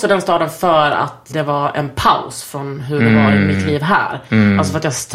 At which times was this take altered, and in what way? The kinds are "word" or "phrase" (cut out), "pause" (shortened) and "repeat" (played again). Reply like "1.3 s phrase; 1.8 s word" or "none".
1.3 s word